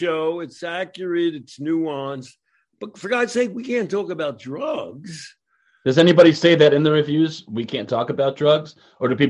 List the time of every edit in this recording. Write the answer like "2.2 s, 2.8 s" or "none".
none